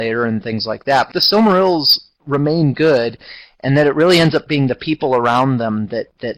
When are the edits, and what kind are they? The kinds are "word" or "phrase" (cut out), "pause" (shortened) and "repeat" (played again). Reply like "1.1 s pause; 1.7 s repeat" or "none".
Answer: 1.1 s phrase

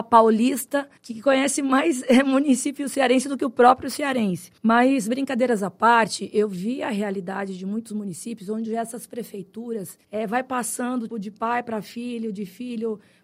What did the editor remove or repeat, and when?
1.0 s pause; 4.6 s pause; 10.0 s pause; 11.1 s word

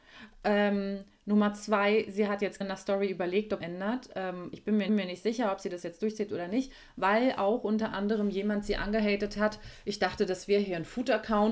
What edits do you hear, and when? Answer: 2.6 s word; 3.6 s phrase; 4.9 s repeat

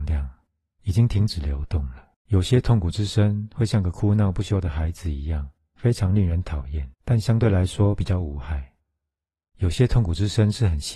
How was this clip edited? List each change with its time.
2.1 s pause; 6.9 s pause

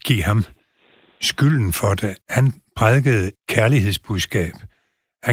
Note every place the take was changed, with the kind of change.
2.2 s pause; 3.3 s word

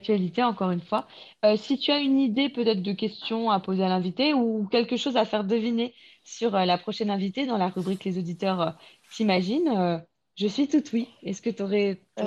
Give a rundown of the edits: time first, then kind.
none

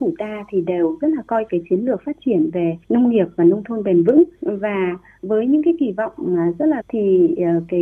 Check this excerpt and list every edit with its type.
1.5 s word; 2.8 s pause; 4.3 s pause; 6.8 s word

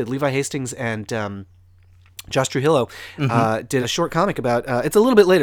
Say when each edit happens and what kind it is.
3.8 s word

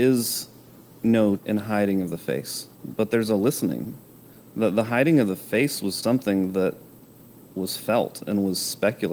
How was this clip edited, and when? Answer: 1.4 s word; 2.7 s pause; 4.4 s pause; 6.0 s word

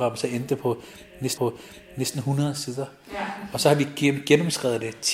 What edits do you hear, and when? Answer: 1.4 s repeat

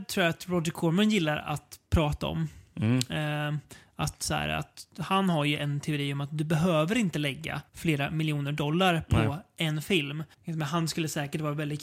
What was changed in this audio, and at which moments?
4.9 s pause; 7.7 s pause; 10.3 s pause

